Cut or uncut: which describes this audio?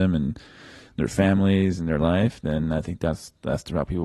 uncut